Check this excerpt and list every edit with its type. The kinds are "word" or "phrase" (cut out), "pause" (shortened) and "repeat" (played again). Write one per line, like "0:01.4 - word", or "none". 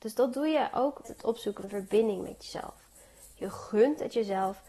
0:01.0 - word
0:01.6 - word